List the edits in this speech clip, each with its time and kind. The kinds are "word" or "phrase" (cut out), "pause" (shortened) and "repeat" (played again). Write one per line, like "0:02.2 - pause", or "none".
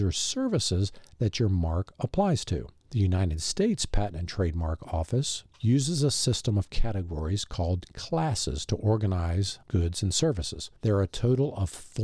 0:05.5 - pause
0:09.6 - pause
0:10.8 - pause